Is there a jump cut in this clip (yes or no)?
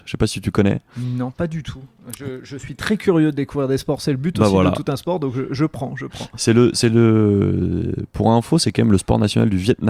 no